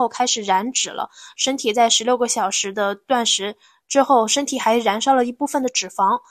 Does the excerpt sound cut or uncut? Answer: uncut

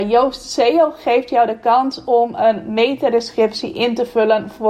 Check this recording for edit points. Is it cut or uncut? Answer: uncut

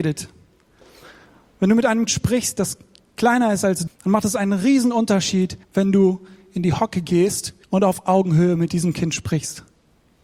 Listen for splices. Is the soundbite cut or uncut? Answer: cut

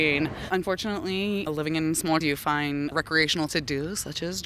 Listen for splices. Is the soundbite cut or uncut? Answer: cut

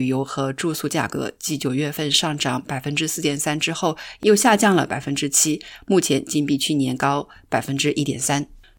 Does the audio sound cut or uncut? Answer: uncut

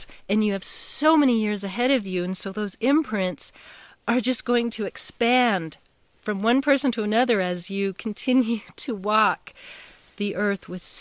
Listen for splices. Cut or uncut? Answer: uncut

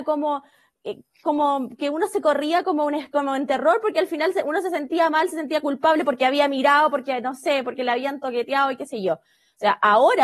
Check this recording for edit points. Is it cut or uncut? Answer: uncut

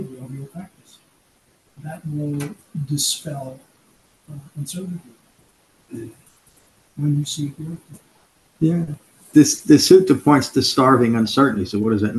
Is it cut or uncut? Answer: uncut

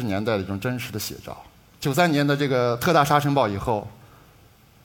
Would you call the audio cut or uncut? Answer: uncut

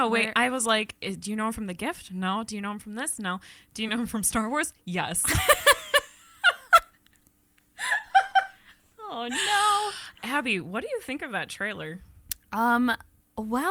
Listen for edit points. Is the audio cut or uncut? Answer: uncut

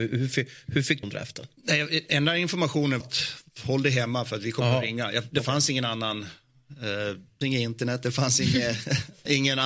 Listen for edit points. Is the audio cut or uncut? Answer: cut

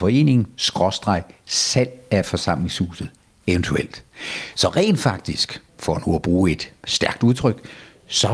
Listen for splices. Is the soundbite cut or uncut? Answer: cut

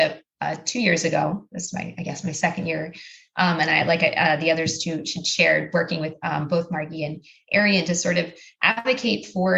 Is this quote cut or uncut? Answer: uncut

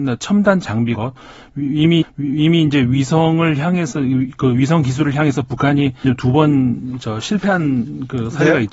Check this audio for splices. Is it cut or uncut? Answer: cut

